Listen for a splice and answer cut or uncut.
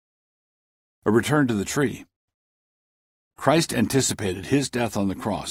uncut